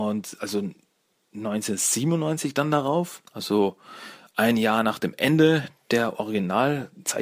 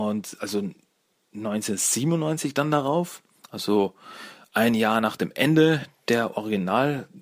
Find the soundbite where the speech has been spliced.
first; 1 cut; at 3.3 s

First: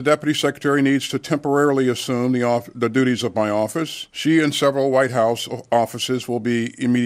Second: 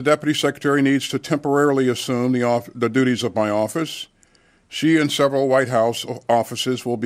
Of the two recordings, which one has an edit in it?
first; 1 cut; at 4.1 s

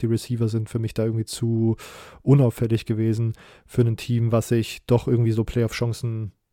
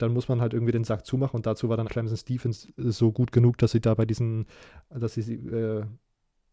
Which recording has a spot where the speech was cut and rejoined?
second; 1 cut; at 1.9 s

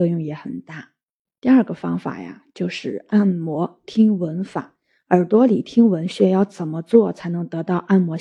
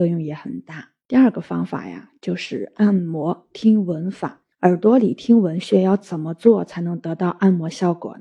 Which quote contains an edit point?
second; 2 cuts; at 1.0 s, 4.5 s

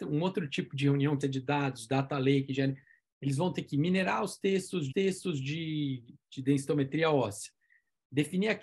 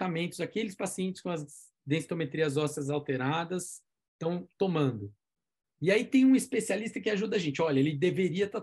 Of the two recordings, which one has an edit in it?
first; 2 cuts; at 1.2 s, 4.9 s

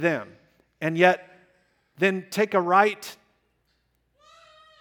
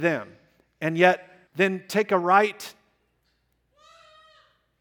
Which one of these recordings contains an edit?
second; 1 cut; at 1.5 s

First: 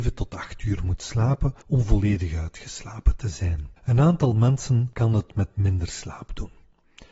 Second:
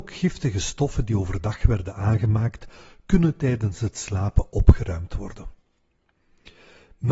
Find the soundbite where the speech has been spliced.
first; 2 cuts; at 1.6 s, 3.8 s

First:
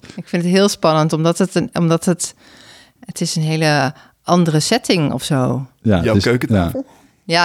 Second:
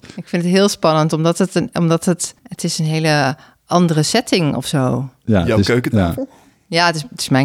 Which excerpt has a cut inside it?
second; 1 cut; at 2.4 s

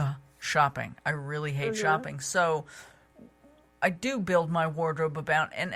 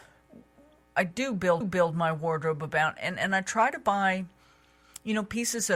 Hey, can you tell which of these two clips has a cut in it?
second; 1 cut; at 1.6 s

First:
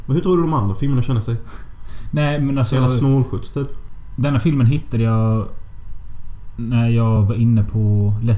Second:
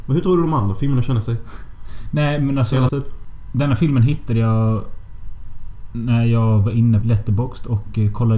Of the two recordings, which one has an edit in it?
second; 2 cuts; at 2.9 s, 7.0 s

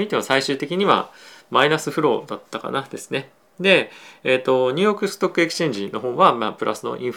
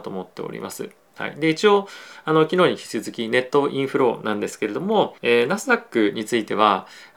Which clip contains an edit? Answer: second; 1 cut; at 5.2 s

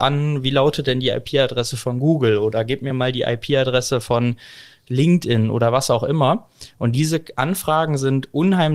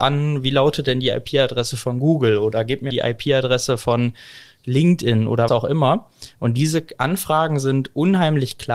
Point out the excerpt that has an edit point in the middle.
second; 2 cuts; at 2.9 s, 5.5 s

